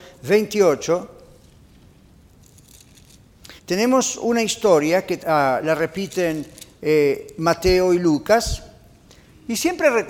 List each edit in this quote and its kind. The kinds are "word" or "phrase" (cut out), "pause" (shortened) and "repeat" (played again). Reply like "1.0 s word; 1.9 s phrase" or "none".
3.6 s pause; 5.2 s word